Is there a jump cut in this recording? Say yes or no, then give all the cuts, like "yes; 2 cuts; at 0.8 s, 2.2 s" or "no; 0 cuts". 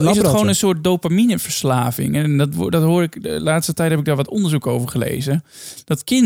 no; 0 cuts